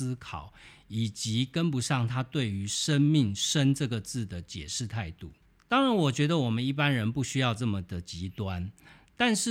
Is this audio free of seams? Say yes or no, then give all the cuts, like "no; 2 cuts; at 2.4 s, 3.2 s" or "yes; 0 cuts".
no; 1 cut; at 5.4 s